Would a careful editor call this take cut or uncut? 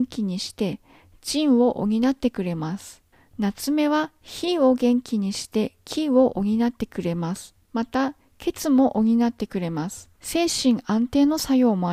cut